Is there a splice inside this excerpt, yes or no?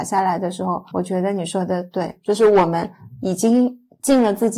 yes